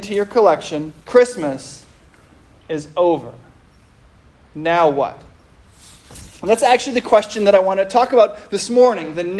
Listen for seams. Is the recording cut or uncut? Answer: cut